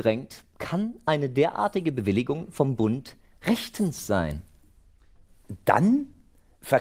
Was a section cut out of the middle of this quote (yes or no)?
no